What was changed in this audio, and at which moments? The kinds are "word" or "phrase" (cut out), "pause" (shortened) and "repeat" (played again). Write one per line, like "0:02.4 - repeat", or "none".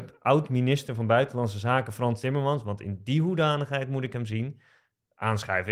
none